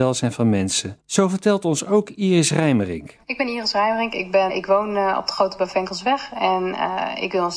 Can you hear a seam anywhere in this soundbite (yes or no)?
yes